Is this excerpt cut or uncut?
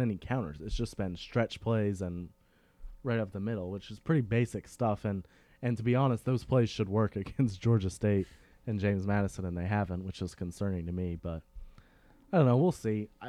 uncut